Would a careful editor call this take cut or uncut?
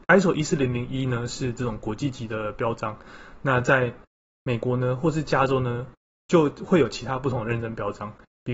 uncut